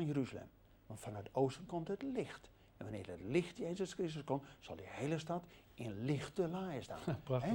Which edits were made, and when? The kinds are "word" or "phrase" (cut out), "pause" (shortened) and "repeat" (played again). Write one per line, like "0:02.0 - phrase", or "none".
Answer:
none